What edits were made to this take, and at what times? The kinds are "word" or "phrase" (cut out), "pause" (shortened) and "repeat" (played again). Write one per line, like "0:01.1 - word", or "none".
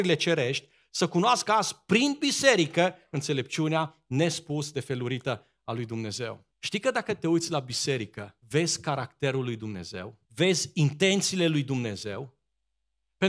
0:06.5 - pause
0:08.4 - pause
0:10.2 - pause